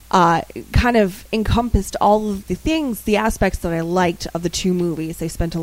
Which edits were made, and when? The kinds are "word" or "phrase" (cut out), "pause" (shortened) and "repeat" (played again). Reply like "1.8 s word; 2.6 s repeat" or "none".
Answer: 2.4 s word